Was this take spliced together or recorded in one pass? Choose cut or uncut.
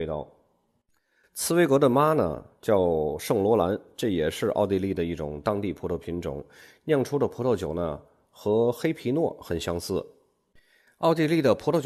uncut